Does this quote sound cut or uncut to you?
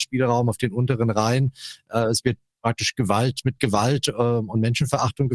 uncut